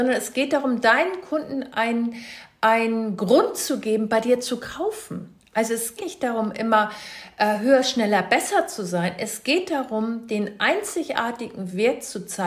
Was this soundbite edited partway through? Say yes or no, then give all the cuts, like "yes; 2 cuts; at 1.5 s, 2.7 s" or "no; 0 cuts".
yes; 1 cut; at 6.0 s